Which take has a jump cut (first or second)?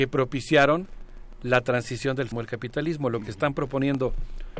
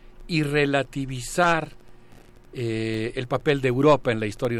first